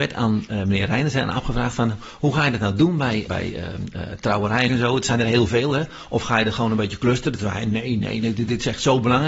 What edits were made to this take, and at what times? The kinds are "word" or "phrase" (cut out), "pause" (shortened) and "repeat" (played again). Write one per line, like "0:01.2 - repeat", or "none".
0:03.3 - word
0:04.7 - word
0:08.0 - word